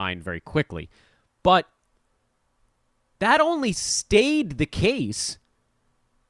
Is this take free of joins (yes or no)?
yes